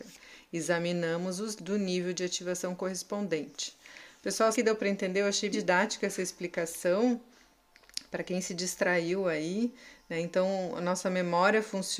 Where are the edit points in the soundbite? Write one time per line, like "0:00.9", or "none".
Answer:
0:01.6
0:04.5
0:05.5